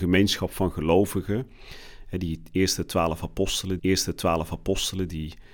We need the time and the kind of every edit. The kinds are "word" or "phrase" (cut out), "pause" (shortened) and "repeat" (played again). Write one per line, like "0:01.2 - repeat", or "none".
0:03.8 - repeat